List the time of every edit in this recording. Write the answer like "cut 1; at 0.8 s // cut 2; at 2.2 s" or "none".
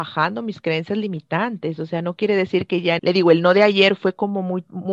cut 1; at 3.0 s